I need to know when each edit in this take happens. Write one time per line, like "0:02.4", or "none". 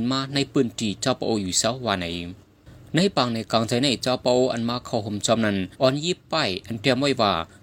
0:05.7